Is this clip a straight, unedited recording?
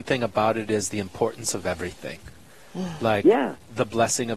yes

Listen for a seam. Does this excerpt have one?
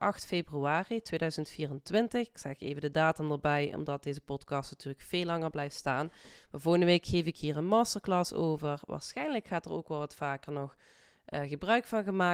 no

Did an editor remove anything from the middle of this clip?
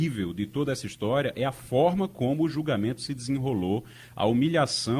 no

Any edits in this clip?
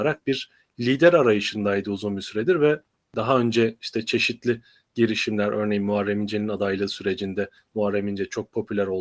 no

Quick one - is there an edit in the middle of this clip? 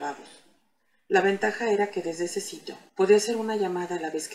yes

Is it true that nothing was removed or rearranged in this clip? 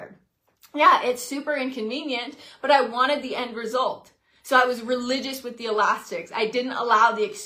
yes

